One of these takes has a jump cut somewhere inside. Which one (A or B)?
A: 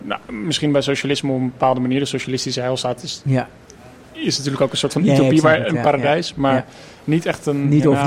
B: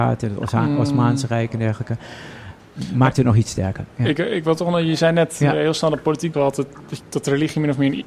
B